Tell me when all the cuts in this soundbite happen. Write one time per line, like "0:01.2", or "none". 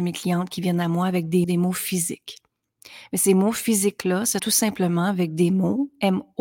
0:01.4
0:04.4